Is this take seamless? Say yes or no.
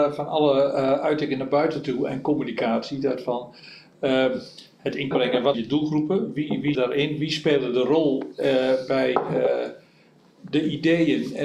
no